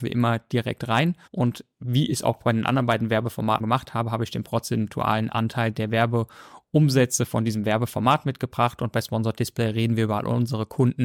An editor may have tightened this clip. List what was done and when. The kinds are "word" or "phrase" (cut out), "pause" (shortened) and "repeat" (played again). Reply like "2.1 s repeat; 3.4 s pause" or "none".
1.3 s pause; 3.6 s word